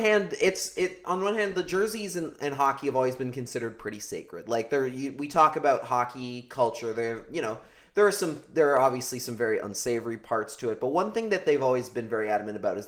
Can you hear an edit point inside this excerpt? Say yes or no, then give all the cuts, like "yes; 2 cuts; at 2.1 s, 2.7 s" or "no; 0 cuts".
no; 0 cuts